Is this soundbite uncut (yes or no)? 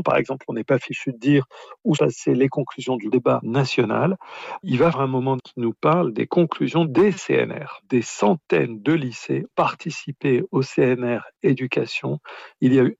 no